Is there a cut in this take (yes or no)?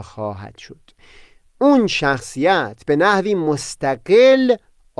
no